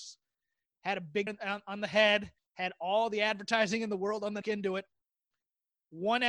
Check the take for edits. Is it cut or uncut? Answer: cut